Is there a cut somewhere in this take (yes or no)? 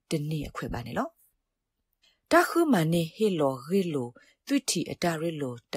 no